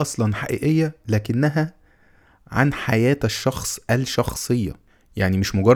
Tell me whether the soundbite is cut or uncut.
uncut